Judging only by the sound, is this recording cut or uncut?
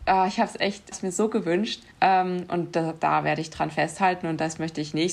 cut